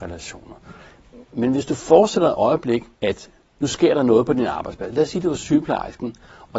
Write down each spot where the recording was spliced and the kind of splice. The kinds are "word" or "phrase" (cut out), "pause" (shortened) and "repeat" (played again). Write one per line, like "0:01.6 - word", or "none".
0:01.3 - pause
0:02.9 - pause